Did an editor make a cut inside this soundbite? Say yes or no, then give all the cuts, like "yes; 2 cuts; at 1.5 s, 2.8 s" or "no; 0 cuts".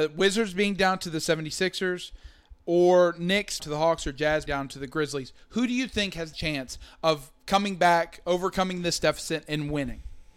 yes; 4 cuts; at 2.6 s, 3.6 s, 4.5 s, 6.3 s